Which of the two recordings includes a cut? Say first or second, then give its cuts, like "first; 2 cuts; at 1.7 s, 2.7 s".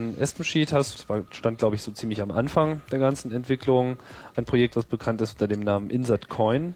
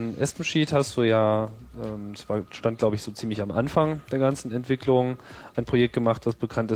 first; 2 cuts; at 0.9 s, 4.7 s